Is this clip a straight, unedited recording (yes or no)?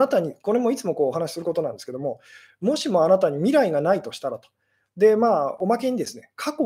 yes